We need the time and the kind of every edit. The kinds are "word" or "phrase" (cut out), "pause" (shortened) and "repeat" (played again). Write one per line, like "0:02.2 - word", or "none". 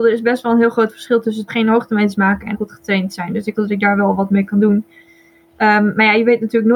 0:01.5 - word
0:02.5 - word
0:03.5 - word